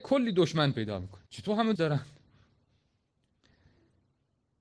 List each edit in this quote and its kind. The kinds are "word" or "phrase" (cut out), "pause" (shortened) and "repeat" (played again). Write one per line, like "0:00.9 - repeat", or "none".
0:01.3 - pause
0:01.8 - word

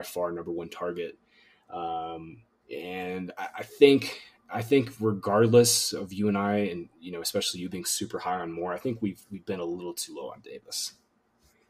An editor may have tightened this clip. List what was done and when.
none

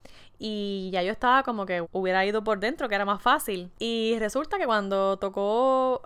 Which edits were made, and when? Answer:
0:01.8 - word

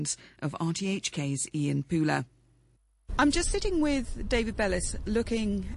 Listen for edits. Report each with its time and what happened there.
none

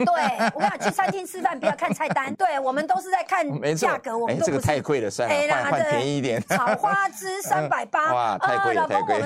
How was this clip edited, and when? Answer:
0:02.3 - word

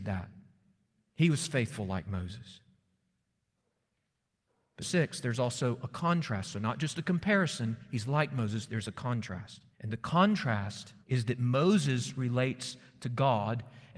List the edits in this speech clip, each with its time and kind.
0:04.8 - phrase
0:09.7 - pause
0:11.0 - pause

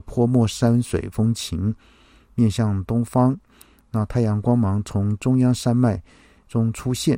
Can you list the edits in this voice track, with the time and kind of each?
none

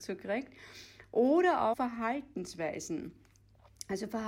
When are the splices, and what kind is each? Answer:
0:01.7 - word

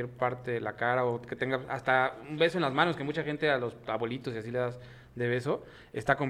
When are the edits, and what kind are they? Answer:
none

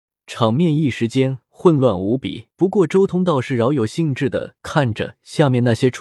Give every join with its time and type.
0:02.5 - pause

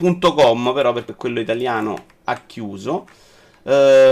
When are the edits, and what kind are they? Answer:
0:01.1 - word

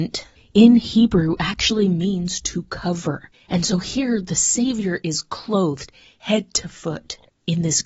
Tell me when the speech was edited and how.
none

